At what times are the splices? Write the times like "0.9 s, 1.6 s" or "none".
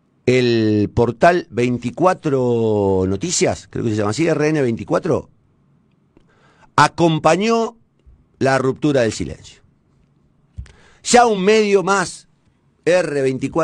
none